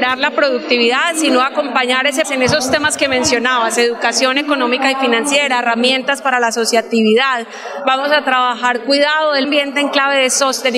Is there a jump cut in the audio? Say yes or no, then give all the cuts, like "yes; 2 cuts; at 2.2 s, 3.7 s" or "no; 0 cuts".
yes; 2 cuts; at 2.2 s, 9.4 s